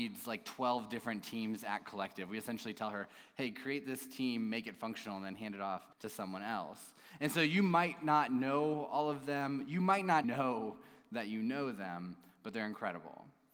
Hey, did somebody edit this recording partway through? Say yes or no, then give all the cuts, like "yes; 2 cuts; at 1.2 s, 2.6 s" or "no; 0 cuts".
yes; 2 cuts; at 5.9 s, 10.2 s